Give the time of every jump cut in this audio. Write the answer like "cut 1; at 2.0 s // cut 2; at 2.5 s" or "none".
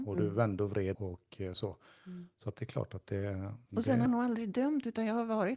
cut 1; at 0.9 s // cut 2; at 3.7 s // cut 3; at 4.1 s